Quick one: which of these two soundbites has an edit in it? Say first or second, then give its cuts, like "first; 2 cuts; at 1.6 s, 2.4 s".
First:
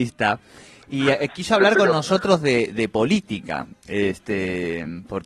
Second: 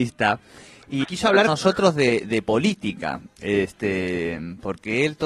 second; 2 cuts; at 1.0 s, 1.5 s